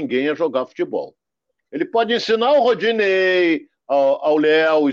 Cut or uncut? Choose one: uncut